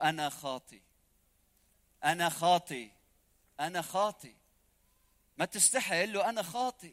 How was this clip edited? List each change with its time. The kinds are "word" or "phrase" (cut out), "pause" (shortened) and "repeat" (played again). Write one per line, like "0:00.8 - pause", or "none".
none

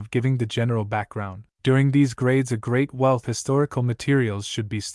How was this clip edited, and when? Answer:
0:01.5 - pause
0:03.2 - word

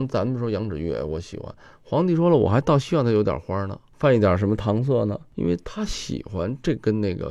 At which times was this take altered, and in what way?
none

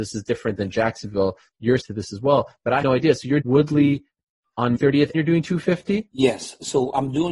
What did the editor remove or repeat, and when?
0:01.8 - word
0:02.8 - word
0:03.4 - word
0:04.8 - word
0:05.1 - word

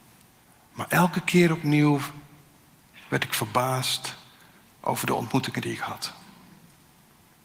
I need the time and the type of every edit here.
none

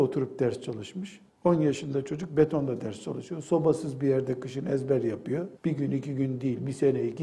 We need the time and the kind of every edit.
0:01.3 - pause
0:05.6 - pause

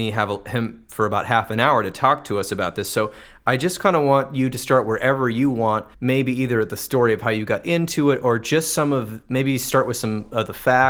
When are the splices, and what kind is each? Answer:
0:05.9 - pause

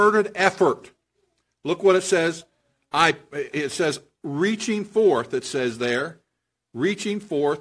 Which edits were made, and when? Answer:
0:03.5 - word

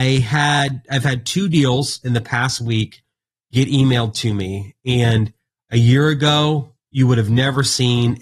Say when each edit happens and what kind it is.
none

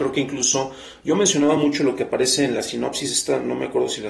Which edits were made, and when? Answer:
none

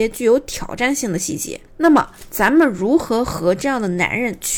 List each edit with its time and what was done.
0:01.7 - pause

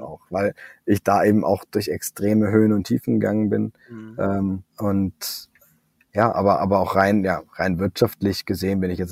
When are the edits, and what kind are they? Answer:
0:04.7 - pause

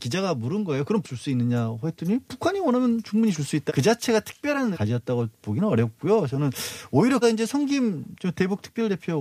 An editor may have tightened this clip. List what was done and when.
0:01.0 - word
0:03.7 - word
0:04.7 - word
0:07.2 - word

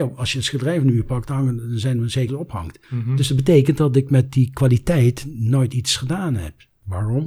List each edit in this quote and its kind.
0:02.3 - phrase
0:02.8 - pause

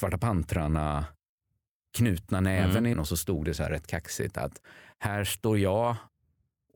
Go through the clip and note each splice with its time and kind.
0:02.9 - word

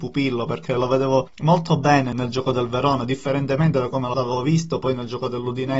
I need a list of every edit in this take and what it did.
none

